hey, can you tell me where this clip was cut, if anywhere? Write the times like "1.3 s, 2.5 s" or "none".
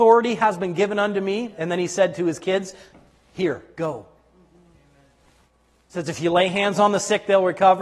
none